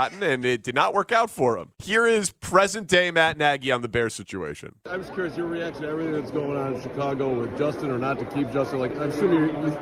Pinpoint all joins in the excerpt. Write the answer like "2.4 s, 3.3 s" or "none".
1.7 s, 8.9 s